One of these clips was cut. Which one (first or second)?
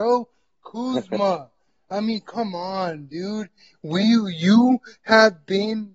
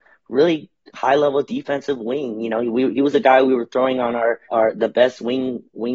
second